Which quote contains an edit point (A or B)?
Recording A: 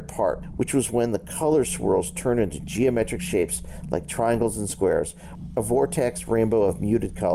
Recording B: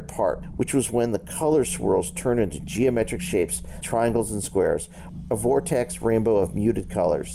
B